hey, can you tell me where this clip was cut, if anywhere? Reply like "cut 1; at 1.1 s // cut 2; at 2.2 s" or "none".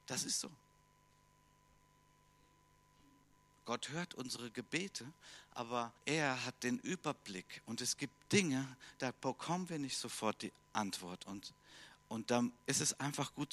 cut 1; at 6.0 s // cut 2; at 12.6 s

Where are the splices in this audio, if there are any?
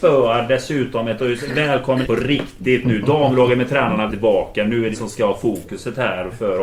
cut 1; at 1.2 s // cut 2; at 2.0 s // cut 3; at 4.1 s // cut 4; at 4.9 s

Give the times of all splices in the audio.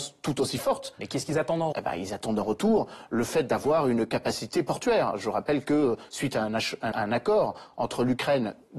cut 1; at 1.7 s // cut 2; at 6.9 s

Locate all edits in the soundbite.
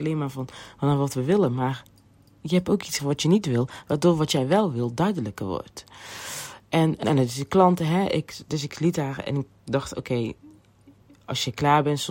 cut 1; at 3.0 s // cut 2; at 7.0 s

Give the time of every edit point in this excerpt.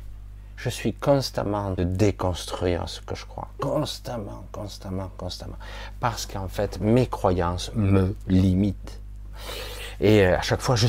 cut 1; at 1.8 s

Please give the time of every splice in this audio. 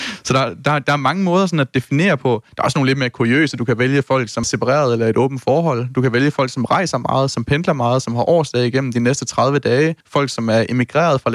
cut 1; at 4.4 s // cut 2; at 10.0 s

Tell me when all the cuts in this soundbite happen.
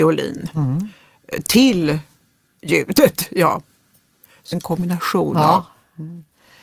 cut 1; at 4.5 s

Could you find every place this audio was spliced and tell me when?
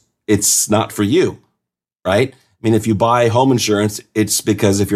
none

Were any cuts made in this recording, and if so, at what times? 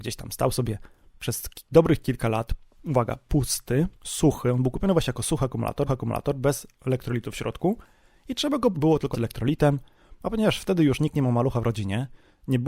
cut 1; at 4.0 s // cut 2; at 5.9 s // cut 3; at 8.7 s // cut 4; at 9.1 s

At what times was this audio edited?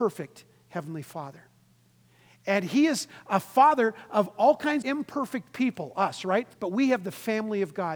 cut 1; at 4.8 s // cut 2; at 6.5 s

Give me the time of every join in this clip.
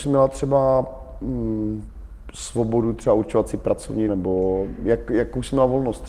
cut 1; at 4.1 s

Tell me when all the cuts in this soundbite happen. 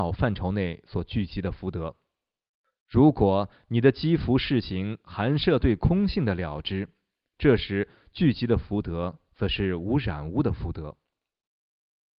none

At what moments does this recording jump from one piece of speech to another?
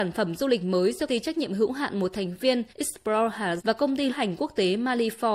cut 1; at 1.1 s // cut 2; at 2.7 s // cut 3; at 3.6 s // cut 4; at 4.1 s

